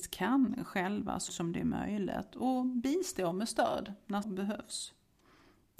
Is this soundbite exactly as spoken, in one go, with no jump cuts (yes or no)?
no